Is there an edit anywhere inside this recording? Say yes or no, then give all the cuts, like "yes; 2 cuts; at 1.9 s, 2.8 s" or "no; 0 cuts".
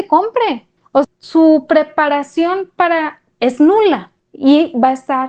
yes; 2 cuts; at 1.0 s, 3.3 s